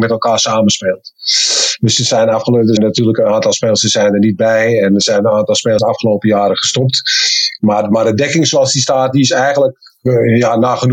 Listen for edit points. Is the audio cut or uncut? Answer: cut